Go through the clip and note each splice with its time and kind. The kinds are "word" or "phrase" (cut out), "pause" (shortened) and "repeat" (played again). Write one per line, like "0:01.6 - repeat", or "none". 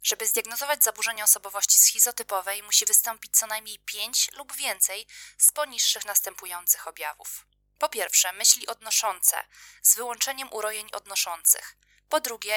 none